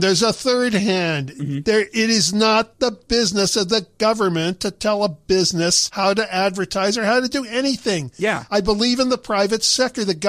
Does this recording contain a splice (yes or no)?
no